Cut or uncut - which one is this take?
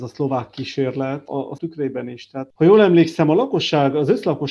cut